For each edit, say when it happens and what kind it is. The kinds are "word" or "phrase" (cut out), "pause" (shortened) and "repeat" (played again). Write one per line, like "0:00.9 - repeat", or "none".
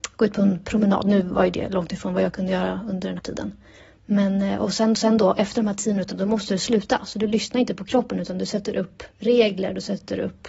0:03.2 - word
0:04.9 - repeat